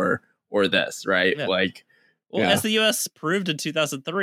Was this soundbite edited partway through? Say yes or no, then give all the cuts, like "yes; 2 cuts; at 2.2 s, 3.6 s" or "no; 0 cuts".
no; 0 cuts